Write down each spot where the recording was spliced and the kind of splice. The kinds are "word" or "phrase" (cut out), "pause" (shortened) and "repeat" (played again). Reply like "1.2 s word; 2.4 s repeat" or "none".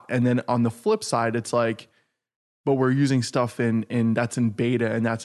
none